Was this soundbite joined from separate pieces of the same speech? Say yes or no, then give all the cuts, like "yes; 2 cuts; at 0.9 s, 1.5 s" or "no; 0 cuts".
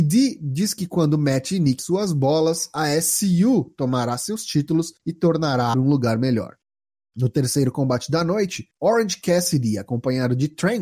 yes; 2 cuts; at 1.8 s, 5.7 s